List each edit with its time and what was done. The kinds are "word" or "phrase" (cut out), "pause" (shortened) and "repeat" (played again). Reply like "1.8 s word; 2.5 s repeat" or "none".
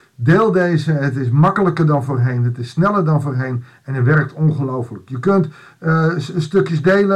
none